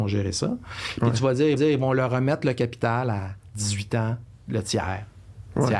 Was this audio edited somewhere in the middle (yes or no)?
yes